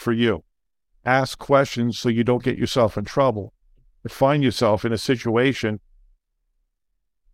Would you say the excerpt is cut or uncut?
uncut